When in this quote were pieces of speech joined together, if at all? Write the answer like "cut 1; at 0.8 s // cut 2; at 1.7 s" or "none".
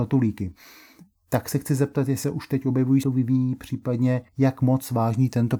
cut 1; at 2.2 s // cut 2; at 3.0 s // cut 3; at 4.3 s